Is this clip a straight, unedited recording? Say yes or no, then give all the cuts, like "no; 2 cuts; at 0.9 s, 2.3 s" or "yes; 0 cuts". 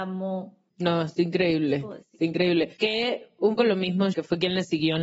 no; 3 cuts; at 2.8 s, 3.6 s, 4.1 s